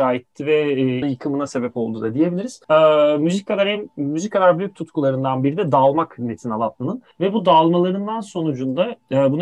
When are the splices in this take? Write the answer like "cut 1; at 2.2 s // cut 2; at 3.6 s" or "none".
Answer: cut 1; at 1.0 s // cut 2; at 2.6 s // cut 3; at 7.1 s